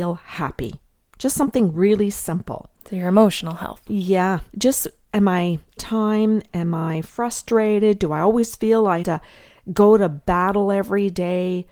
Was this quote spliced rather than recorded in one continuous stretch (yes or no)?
yes